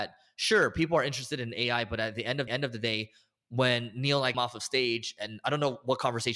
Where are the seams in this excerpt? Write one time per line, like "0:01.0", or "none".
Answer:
0:02.5
0:04.3

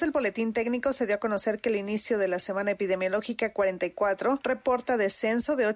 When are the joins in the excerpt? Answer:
none

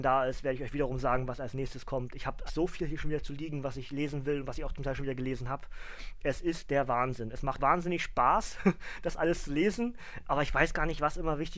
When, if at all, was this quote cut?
0:02.5
0:07.6

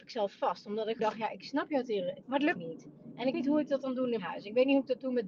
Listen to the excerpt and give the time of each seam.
0:01.0
0:02.2
0:02.6
0:03.3
0:04.2

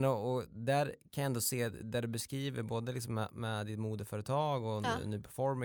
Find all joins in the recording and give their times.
none

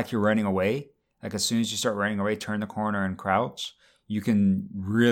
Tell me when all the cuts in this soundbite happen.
none

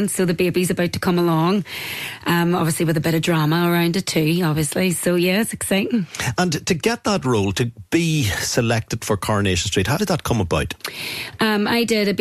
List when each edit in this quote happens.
0:10.0

